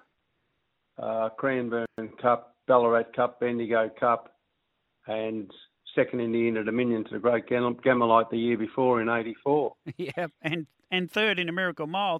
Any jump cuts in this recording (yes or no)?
no